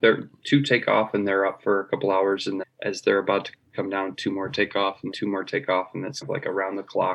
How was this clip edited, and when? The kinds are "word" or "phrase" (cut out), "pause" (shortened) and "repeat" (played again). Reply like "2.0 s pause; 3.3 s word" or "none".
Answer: 2.6 s word; 5.1 s word; 6.2 s word